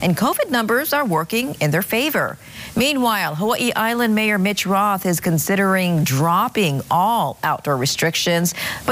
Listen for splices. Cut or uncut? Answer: uncut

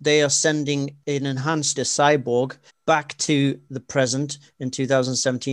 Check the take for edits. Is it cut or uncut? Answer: cut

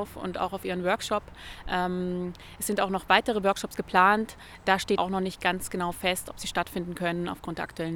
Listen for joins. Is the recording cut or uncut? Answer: cut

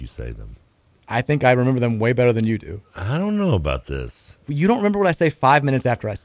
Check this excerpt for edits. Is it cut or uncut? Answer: uncut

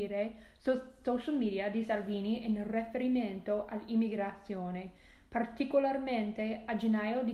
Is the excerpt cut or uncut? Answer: uncut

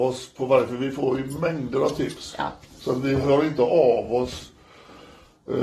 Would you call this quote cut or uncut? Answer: uncut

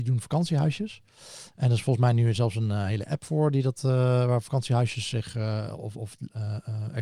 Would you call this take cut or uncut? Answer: uncut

